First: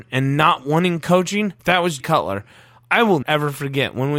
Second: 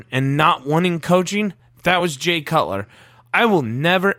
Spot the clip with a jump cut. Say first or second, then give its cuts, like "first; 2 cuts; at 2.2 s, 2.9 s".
first; 3 cuts; at 1.6 s, 2.0 s, 3.2 s